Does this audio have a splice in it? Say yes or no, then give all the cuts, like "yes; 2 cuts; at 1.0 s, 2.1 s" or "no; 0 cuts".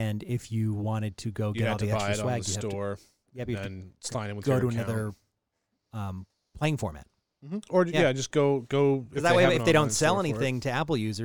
no; 0 cuts